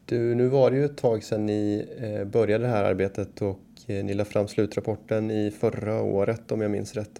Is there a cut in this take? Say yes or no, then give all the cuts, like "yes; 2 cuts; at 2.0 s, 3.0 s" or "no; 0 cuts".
no; 0 cuts